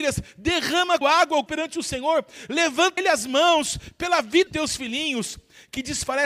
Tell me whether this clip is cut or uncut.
cut